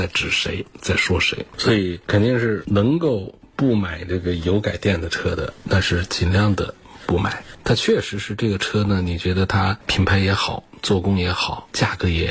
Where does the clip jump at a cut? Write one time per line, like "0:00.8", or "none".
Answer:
none